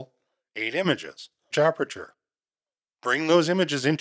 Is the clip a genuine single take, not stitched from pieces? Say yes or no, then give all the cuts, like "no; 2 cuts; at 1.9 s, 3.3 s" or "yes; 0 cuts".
no; 1 cut; at 1.5 s